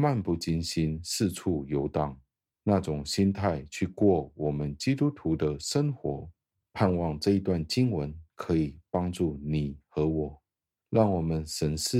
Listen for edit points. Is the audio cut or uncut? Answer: uncut